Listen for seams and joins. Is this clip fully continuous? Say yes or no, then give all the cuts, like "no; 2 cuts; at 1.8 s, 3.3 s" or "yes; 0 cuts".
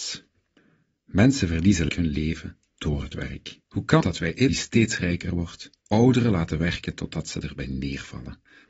no; 5 cuts; at 1.9 s, 3.6 s, 4.0 s, 4.5 s, 5.8 s